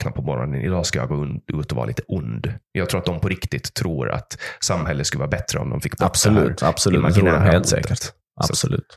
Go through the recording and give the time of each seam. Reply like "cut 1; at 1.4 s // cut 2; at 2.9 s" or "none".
cut 1; at 2.7 s